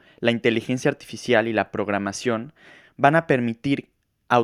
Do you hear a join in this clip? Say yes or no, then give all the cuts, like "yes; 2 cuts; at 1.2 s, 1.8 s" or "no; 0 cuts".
no; 0 cuts